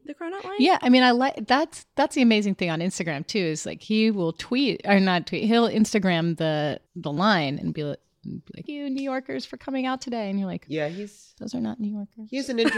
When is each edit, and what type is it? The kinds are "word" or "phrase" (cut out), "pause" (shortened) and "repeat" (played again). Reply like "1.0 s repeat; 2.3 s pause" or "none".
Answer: 6.9 s pause; 8.7 s word